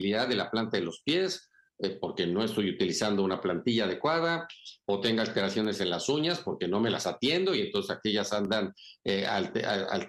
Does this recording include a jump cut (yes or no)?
no